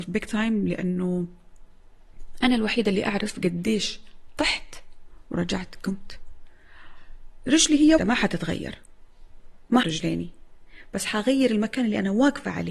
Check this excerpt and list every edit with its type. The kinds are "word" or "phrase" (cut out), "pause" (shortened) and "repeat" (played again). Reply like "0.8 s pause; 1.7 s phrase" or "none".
8.0 s word; 9.8 s word